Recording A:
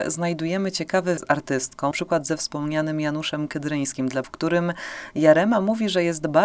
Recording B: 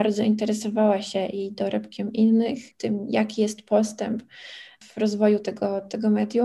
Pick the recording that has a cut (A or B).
A